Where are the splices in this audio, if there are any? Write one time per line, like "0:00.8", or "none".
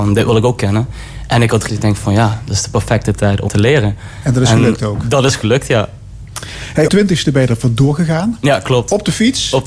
0:01.7
0:03.5
0:06.9